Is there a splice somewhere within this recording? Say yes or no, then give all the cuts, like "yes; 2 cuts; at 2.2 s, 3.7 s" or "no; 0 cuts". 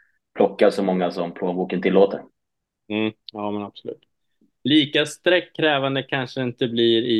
no; 0 cuts